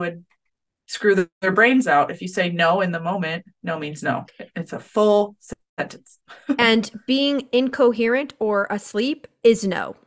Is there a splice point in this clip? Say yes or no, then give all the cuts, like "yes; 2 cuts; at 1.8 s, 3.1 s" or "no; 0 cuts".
no; 0 cuts